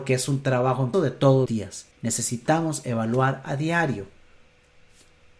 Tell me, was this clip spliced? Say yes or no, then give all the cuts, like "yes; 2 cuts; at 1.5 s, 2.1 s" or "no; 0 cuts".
yes; 3 cuts; at 0.9 s, 1.5 s, 1.9 s